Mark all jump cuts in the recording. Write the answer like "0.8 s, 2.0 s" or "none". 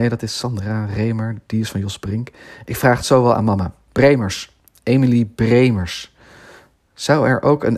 none